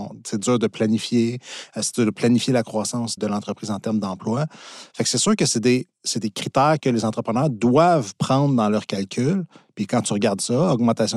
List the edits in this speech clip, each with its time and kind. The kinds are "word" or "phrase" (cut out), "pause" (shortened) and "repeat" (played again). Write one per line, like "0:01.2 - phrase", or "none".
0:03.2 - word